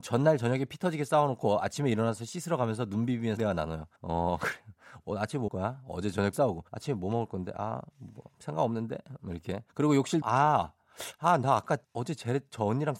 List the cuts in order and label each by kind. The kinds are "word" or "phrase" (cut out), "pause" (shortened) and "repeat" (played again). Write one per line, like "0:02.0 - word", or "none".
0:03.4 - word
0:04.0 - pause
0:05.5 - word
0:06.3 - word
0:06.7 - pause
0:09.7 - pause
0:10.2 - word
0:11.8 - pause